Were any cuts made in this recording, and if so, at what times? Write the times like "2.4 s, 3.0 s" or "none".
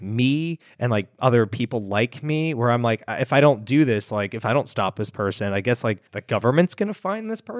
6.1 s